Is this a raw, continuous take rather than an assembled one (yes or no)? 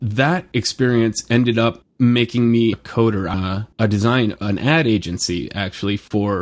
no